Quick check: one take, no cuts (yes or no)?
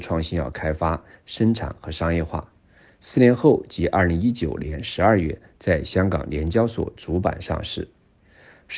yes